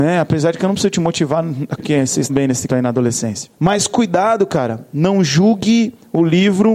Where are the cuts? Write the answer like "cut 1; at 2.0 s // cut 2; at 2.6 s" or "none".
cut 1; at 1.8 s // cut 2; at 2.3 s // cut 3; at 2.7 s // cut 4; at 3.5 s